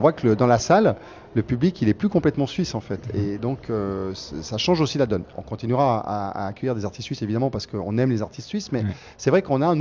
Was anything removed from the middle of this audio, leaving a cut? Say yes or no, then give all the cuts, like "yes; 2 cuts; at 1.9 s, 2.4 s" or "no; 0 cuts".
no; 0 cuts